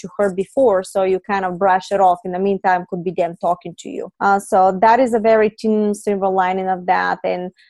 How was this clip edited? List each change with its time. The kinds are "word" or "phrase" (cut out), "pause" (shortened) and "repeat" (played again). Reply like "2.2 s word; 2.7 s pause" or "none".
4.1 s pause